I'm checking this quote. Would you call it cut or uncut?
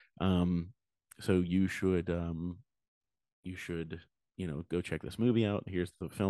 uncut